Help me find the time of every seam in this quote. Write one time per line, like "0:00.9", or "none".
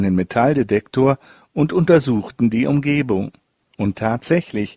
none